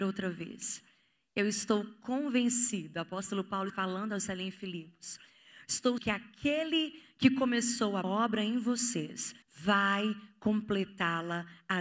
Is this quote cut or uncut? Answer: cut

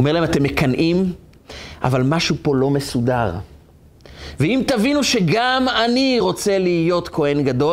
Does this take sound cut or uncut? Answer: uncut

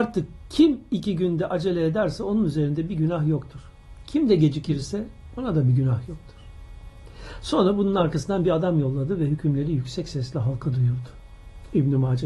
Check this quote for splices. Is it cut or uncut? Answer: uncut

